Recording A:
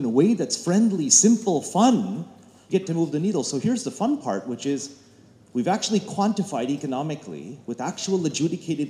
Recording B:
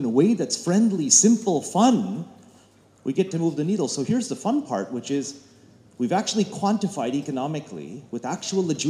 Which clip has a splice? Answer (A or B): A